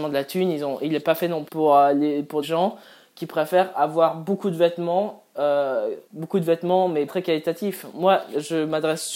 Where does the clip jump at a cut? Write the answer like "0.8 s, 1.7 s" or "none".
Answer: 1.5 s, 2.4 s, 3.7 s, 6.0 s, 7.1 s